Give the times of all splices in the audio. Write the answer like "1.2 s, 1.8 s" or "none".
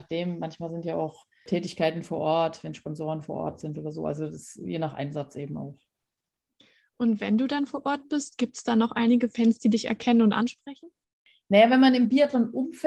none